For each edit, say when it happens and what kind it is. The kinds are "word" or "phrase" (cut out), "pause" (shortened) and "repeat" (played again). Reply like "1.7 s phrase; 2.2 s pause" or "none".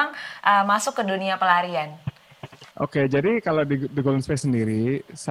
2.7 s pause